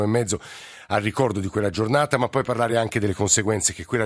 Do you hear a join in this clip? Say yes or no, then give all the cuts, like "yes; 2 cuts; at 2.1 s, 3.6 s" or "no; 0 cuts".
no; 0 cuts